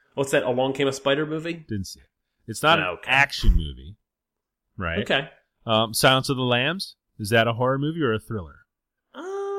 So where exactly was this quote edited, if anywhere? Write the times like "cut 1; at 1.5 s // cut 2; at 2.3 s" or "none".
none